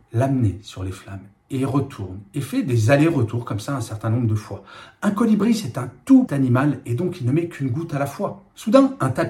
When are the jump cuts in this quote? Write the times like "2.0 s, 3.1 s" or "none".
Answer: 6.3 s